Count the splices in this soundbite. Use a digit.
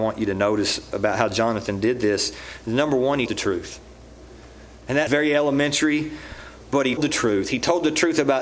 3